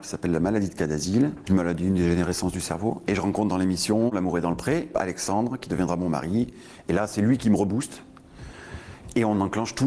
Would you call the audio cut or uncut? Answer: uncut